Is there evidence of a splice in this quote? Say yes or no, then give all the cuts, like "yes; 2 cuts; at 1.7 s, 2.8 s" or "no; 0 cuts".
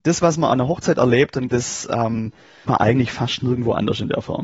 yes; 2 cuts; at 1.5 s, 2.6 s